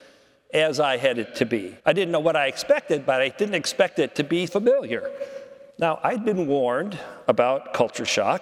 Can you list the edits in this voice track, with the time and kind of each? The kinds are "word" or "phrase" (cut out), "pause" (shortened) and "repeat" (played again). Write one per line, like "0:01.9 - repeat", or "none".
0:01.1 - word
0:01.8 - pause
0:04.5 - word
0:05.7 - pause